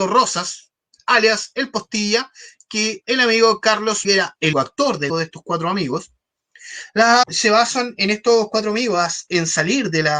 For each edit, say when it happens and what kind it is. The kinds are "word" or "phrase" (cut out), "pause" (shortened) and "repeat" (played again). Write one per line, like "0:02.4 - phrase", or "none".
0:03.0 - word
0:04.0 - word
0:04.5 - word
0:05.1 - word
0:07.2 - word